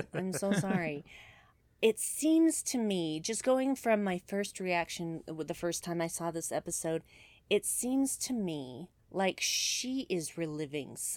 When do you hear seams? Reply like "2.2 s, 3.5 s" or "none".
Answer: none